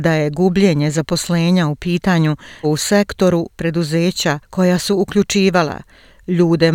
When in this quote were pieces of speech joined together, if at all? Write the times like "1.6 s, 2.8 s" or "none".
2.6 s, 3.5 s

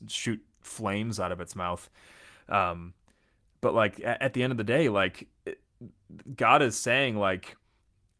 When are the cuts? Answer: none

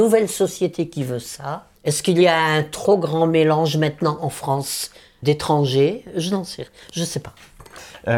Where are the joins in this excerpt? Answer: 1.8 s, 5.2 s

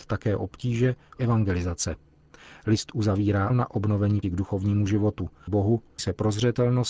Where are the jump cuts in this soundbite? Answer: 1.2 s, 3.5 s, 4.2 s, 5.5 s, 6.0 s

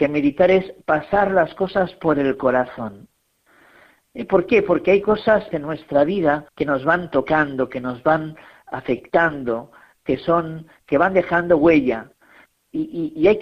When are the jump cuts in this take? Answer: 5.5 s, 6.5 s

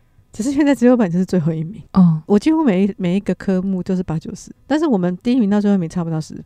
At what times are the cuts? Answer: 1.9 s, 2.3 s, 4.6 s

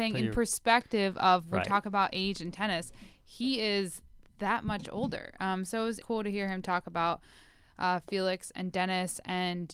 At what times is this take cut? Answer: 6.0 s

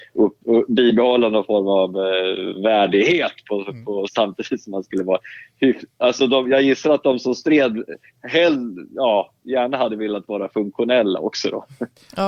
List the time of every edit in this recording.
4.1 s

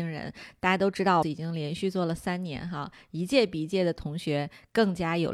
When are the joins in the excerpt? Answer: 1.2 s

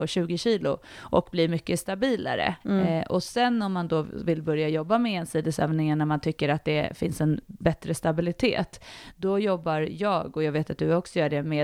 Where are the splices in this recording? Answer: 2.6 s

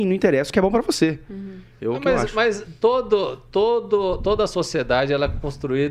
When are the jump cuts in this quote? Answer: none

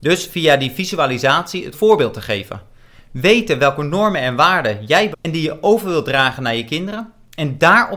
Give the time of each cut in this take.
1.7 s, 5.1 s

